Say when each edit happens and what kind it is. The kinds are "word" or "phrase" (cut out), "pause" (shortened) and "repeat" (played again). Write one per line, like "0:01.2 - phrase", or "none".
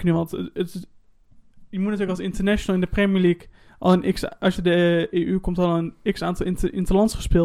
0:03.7 - pause
0:04.6 - phrase